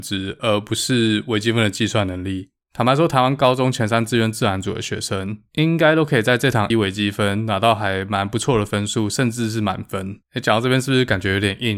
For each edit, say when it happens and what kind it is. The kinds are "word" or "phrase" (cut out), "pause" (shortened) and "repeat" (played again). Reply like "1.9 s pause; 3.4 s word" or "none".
6.7 s word; 10.2 s pause